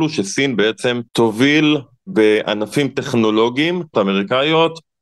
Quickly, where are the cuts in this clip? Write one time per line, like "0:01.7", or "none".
0:01.1
0:03.9